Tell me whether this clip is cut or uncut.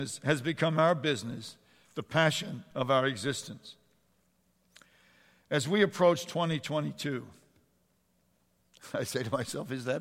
uncut